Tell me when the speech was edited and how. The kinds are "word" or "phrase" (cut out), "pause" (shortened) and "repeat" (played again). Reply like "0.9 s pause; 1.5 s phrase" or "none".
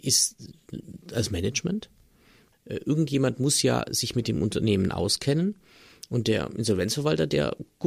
2.5 s word